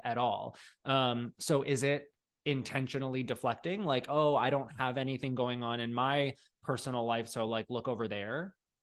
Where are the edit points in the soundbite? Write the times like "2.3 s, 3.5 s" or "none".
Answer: none